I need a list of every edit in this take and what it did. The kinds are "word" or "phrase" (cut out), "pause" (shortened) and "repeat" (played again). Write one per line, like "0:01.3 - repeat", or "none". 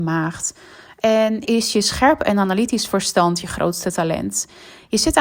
0:01.4 - word